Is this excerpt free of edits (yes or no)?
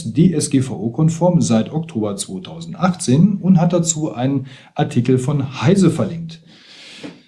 yes